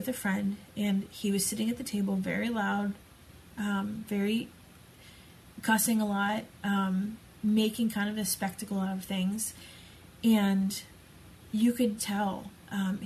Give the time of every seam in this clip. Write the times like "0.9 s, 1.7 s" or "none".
5.5 s, 12.0 s